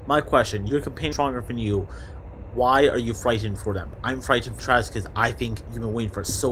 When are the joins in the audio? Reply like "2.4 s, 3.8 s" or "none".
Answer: 1.1 s, 4.6 s